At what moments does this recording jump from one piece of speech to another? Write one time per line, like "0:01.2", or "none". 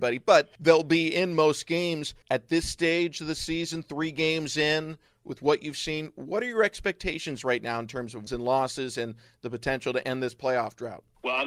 0:02.2
0:08.3

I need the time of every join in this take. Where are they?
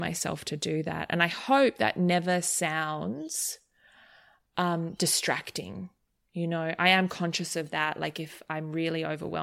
none

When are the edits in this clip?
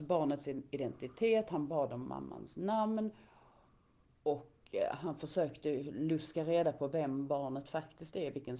none

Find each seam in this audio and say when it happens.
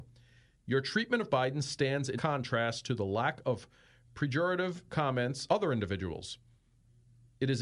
0:01.3
0:02.2
0:05.5

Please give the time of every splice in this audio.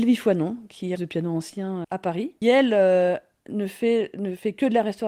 0:01.0
0:01.8
0:02.4

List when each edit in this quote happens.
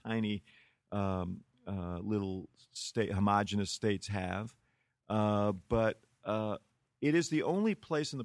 none

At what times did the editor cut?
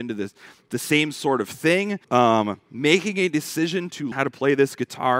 0:02.0
0:04.1

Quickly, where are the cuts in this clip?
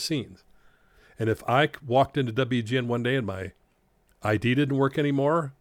none

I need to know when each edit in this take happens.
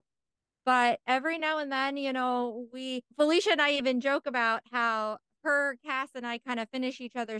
none

